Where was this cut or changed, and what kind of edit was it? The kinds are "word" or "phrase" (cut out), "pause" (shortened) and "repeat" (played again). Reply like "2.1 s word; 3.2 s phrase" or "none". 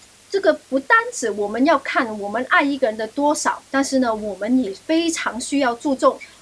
3.7 s pause